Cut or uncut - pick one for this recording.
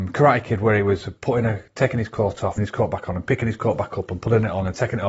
cut